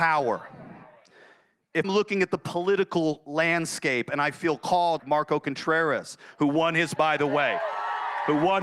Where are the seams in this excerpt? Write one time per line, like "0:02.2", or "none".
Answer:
0:01.8
0:05.0
0:07.0